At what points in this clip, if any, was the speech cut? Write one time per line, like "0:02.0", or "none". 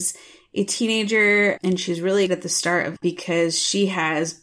0:01.6
0:02.3
0:03.0